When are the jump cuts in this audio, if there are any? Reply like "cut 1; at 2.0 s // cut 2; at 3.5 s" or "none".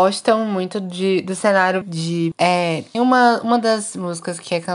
cut 1; at 1.8 s // cut 2; at 2.3 s // cut 3; at 2.9 s